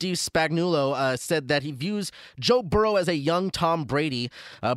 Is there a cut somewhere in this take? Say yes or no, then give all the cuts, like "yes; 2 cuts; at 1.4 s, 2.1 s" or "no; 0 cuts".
no; 0 cuts